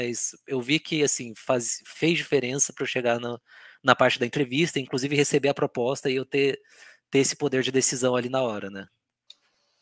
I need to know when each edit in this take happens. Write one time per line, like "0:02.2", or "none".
none